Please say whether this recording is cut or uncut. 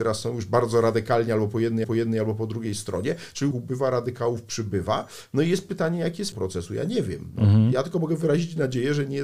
cut